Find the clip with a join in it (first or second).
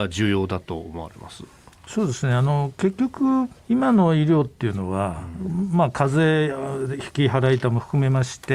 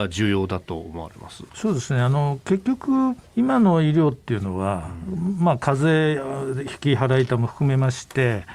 second